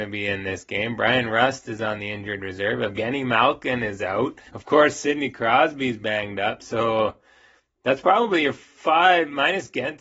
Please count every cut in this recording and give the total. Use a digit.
1